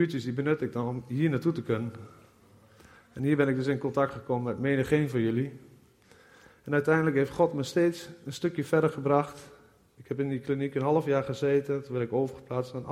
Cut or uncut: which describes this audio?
uncut